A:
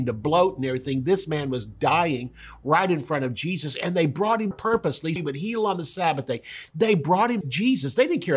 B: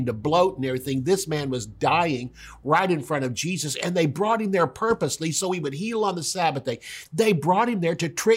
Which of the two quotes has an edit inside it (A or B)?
A